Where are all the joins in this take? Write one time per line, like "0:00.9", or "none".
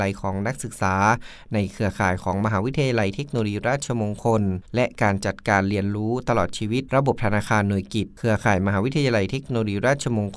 0:04.7